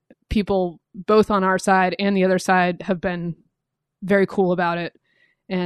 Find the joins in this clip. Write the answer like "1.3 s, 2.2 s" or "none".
none